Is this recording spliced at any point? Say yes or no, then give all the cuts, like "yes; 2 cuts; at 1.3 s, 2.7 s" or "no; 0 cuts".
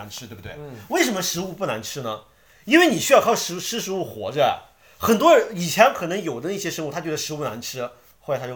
no; 0 cuts